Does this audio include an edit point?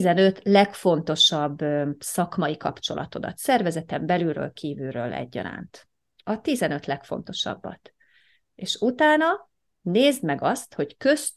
no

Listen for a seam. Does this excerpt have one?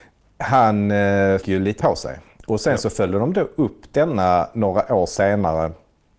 yes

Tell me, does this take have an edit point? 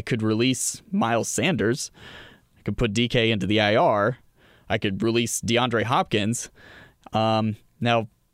no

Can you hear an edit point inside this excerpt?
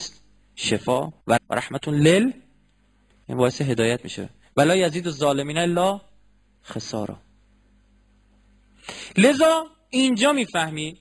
yes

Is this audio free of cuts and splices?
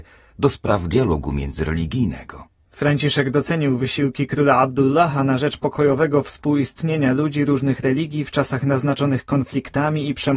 yes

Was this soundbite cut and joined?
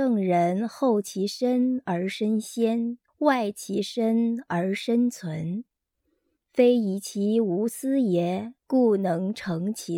yes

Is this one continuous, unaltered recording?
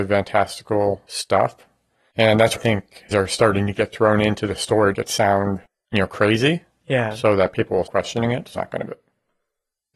no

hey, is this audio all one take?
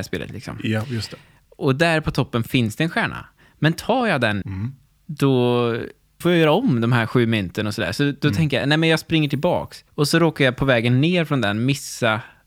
no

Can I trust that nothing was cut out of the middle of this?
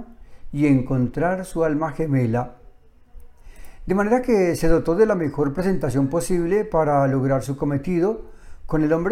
yes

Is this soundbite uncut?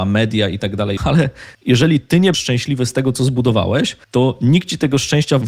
no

